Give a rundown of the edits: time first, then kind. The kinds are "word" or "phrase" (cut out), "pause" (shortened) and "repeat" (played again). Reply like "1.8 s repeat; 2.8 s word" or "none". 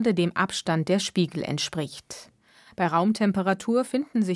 none